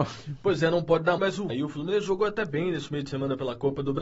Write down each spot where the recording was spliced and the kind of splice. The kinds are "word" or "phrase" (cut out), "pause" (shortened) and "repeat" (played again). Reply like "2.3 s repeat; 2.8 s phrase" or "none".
1.2 s word; 1.5 s phrase